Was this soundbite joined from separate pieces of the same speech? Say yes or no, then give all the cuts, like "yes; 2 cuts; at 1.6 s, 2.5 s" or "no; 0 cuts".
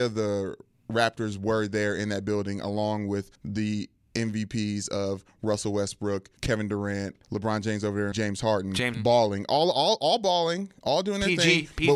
yes; 5 cuts; at 3.4 s, 6.4 s, 7.2 s, 8.1 s, 8.9 s